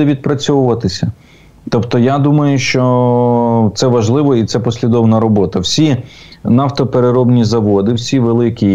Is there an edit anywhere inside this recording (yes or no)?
no